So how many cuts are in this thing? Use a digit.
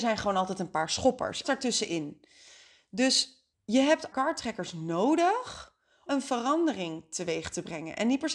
4